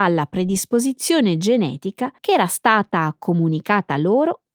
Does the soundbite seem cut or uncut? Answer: cut